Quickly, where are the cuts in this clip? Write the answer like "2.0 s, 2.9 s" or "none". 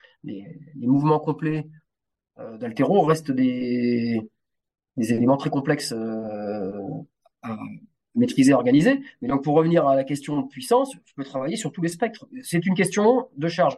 none